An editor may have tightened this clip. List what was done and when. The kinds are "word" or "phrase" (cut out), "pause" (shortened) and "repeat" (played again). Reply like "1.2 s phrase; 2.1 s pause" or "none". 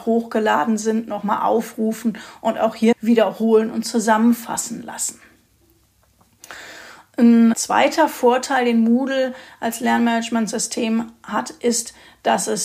2.9 s word; 7.5 s word